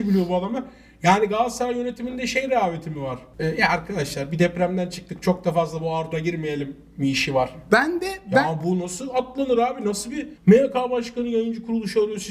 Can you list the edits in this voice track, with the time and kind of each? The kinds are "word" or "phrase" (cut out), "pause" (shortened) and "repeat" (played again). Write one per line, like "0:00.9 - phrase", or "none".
0:06.1 - word
0:10.4 - pause

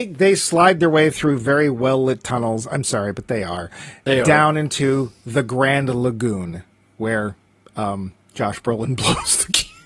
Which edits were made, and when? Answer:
none

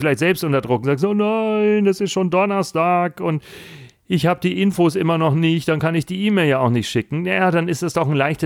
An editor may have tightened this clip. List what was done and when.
none

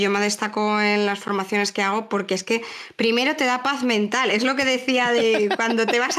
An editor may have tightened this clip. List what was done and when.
none

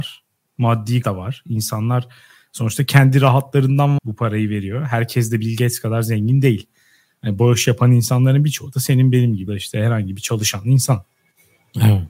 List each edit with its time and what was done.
0:01.0 - word
0:04.0 - word
0:09.5 - word

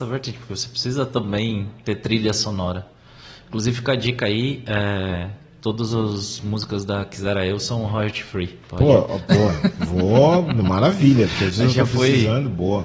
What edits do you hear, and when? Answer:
0:08.6 - pause

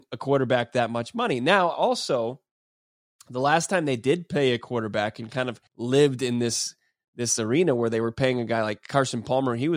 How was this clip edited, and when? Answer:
0:05.7 - pause

